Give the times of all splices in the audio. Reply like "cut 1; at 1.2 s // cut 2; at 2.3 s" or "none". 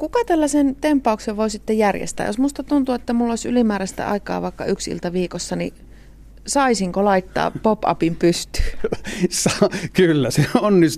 none